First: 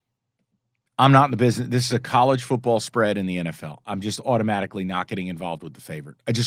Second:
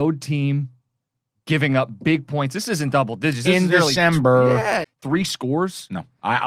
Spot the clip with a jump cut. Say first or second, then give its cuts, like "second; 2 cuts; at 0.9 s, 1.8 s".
second; 1 cut; at 4.8 s